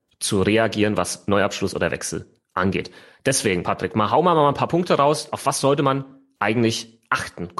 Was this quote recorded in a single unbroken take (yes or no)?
yes